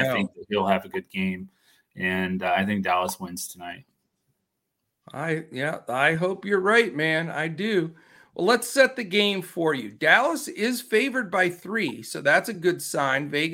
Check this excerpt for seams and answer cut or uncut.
uncut